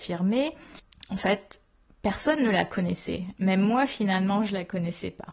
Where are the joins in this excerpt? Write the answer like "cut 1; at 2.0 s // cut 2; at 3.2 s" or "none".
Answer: none